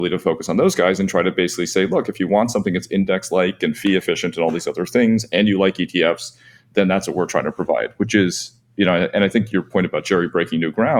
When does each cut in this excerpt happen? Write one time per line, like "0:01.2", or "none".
none